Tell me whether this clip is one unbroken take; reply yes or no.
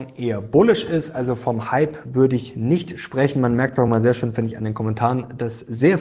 yes